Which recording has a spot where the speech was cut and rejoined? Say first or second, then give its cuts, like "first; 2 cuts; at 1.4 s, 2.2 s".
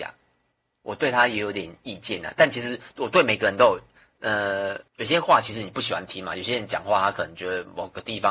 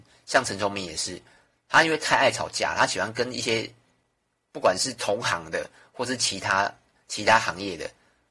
first; 1 cut; at 4.9 s